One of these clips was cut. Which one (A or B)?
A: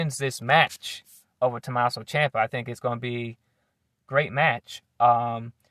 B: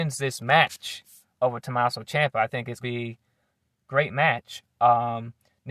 B